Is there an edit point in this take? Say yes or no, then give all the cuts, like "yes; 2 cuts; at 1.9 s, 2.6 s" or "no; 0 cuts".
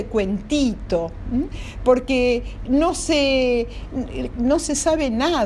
yes; 2 cuts; at 2.7 s, 4.3 s